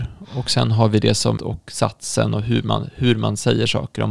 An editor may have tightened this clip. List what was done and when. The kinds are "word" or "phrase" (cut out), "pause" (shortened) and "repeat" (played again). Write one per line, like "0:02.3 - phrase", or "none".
0:01.4 - phrase